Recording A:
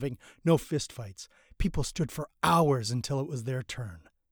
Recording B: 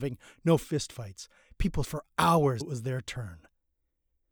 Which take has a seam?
B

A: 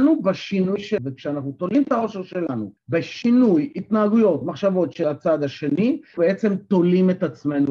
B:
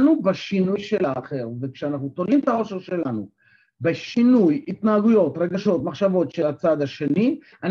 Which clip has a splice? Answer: A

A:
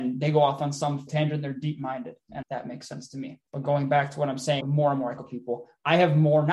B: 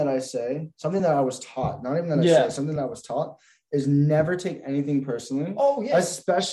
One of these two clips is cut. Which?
A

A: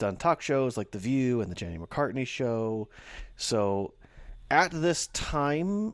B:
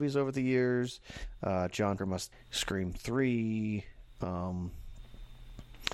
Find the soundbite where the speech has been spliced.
B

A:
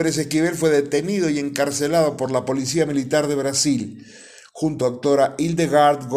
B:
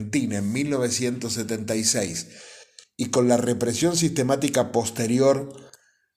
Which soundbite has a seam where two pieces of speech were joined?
A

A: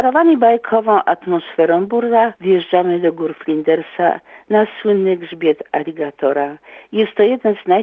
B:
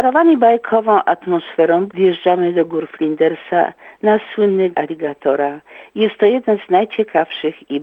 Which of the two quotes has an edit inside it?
B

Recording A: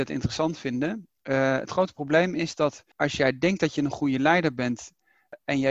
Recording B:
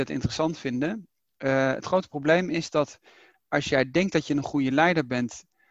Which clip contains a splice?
A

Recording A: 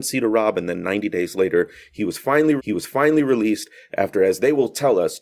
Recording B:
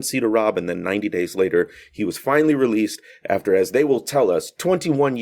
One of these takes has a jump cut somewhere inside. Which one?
A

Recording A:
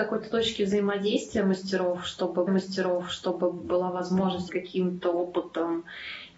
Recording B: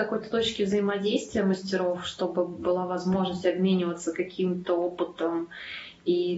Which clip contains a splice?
A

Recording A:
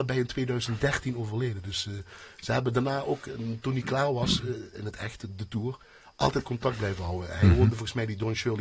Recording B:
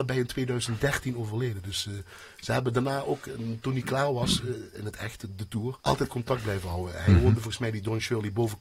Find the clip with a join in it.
B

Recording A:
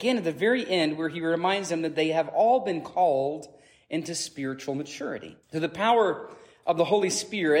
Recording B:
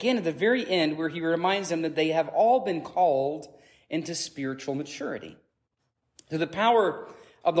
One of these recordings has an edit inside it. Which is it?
A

